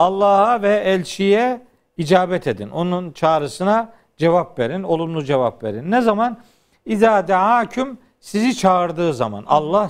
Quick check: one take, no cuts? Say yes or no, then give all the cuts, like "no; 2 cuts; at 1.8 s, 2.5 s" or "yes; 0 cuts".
yes; 0 cuts